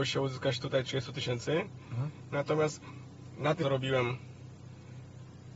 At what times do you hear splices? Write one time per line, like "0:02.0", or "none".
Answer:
0:03.6